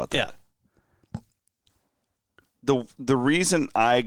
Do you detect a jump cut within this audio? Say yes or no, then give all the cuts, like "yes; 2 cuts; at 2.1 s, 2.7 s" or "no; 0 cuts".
no; 0 cuts